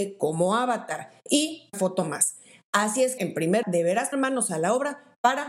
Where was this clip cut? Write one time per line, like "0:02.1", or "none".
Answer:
0:01.7
0:03.2
0:03.6
0:04.1